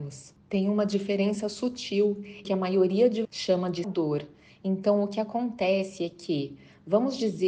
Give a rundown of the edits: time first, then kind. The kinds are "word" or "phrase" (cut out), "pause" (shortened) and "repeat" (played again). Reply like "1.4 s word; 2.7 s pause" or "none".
2.4 s phrase; 3.2 s word; 3.8 s phrase

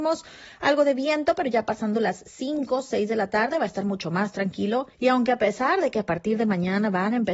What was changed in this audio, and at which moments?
4.9 s pause

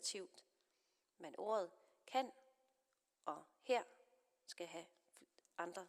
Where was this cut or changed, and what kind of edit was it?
none

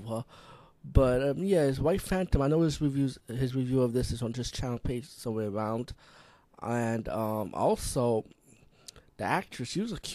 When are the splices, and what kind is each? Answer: none

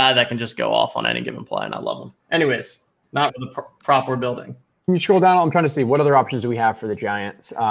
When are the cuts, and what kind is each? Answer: 3.3 s word

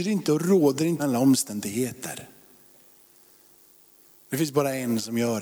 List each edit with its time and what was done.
1.0 s word

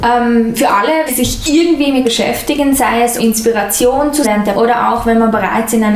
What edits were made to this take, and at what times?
1.1 s word; 2.0 s word; 3.2 s word; 4.2 s word; 4.5 s word

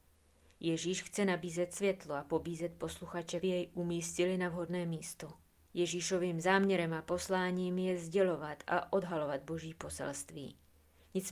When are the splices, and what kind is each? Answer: 3.4 s phrase

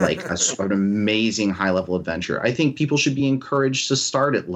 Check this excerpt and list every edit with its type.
none

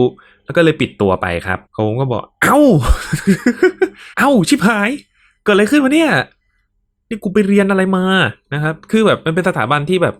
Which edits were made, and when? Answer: 1.7 s pause; 4.1 s pause

